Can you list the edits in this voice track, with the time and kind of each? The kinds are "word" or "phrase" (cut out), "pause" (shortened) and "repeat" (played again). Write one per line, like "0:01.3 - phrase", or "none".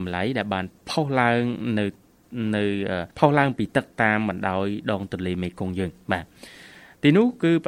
0:03.1 - pause